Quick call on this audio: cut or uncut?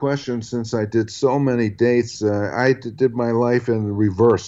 uncut